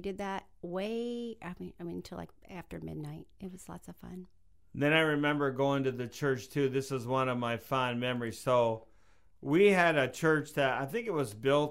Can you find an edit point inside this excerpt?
no; 0 cuts

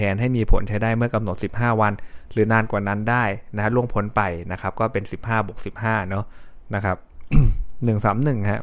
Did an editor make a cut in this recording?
no; 0 cuts

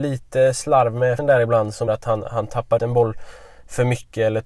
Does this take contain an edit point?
yes; 3 cuts; at 1.2 s, 1.9 s, 2.8 s

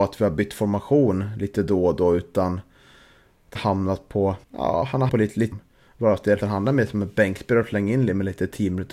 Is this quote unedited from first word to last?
no; 5 cuts; at 3.6 s, 4.4 s, 5.1 s, 5.5 s, 6.4 s

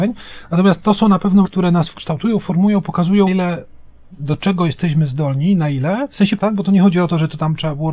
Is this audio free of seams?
no; 3 cuts; at 1.4 s, 3.3 s, 6.4 s

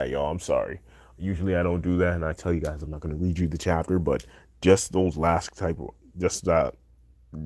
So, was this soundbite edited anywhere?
yes; 1 cut; at 2.4 s

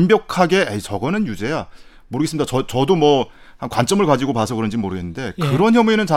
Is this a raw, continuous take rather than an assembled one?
yes; 0 cuts

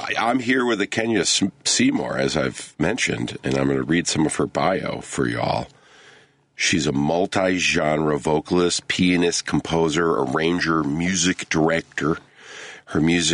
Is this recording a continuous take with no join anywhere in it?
yes; 0 cuts

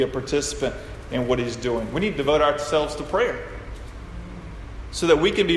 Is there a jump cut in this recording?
no; 0 cuts

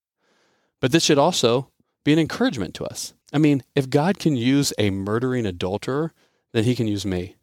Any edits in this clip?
yes; 1 cut; at 3.2 s

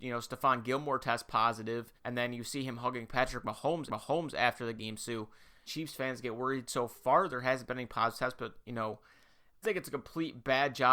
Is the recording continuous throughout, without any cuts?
no; 4 cuts; at 2.0 s, 3.9 s, 5.7 s, 9.6 s

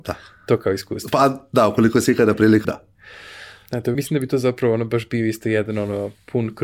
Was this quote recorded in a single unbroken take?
no; 2 cuts; at 2.6 s, 3.9 s

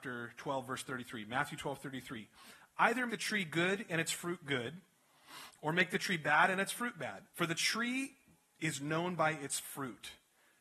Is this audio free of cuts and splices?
no; 2 cuts; at 3.1 s, 7.3 s

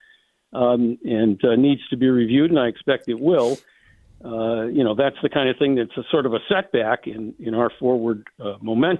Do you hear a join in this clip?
no; 0 cuts

